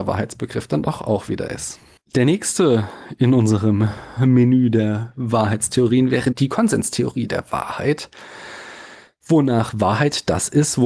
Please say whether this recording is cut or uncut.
uncut